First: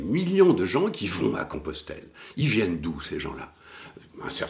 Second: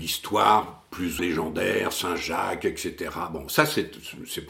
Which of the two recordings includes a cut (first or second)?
second